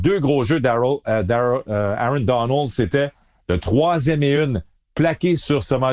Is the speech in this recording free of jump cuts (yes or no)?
yes